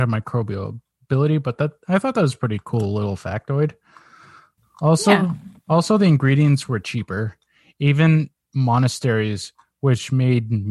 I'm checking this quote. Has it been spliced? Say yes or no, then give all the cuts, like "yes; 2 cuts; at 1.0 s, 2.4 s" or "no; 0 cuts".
no; 0 cuts